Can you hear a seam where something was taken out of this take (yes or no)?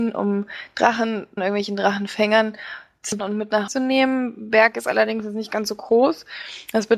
yes